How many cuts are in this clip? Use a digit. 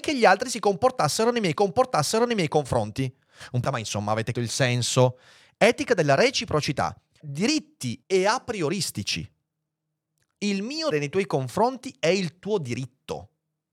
6